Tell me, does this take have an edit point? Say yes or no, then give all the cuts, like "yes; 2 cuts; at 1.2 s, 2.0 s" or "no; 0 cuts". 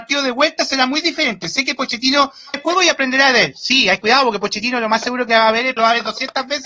yes; 3 cuts; at 2.5 s, 4.0 s, 5.8 s